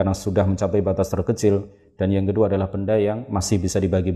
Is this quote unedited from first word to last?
yes; 0 cuts

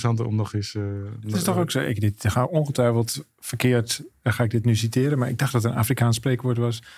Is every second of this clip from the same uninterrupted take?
yes; 0 cuts

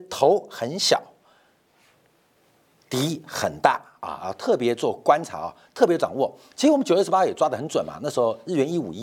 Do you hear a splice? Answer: no; 0 cuts

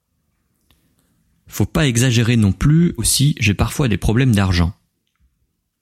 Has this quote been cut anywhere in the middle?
yes; 1 cut; at 3.0 s

